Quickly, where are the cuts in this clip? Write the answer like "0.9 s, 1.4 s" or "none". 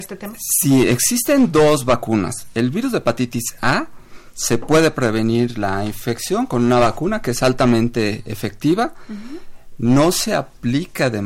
none